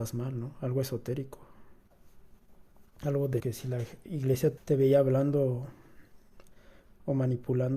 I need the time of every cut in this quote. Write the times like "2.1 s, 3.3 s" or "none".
3.4 s, 4.6 s